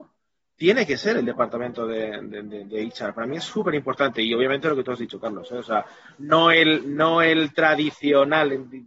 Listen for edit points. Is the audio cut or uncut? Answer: uncut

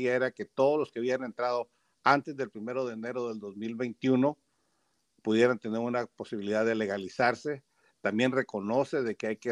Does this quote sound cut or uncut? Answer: uncut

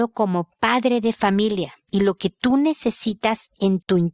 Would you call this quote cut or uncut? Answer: uncut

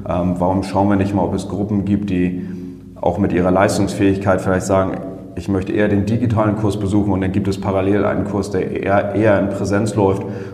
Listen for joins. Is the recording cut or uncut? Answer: uncut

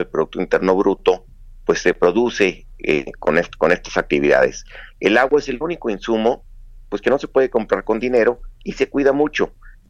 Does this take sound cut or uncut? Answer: uncut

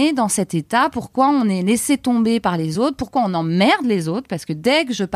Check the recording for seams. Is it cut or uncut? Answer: uncut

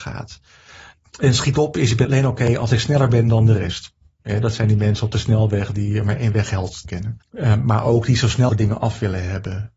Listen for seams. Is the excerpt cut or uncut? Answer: cut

